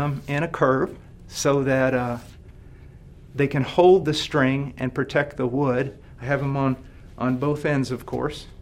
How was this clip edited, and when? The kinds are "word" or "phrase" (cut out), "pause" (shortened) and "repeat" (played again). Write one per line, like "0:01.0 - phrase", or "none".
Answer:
none